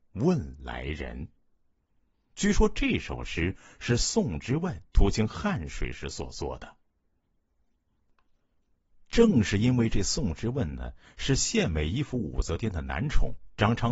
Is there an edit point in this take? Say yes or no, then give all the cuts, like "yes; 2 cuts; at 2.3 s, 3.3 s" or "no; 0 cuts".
yes; 1 cut; at 4.9 s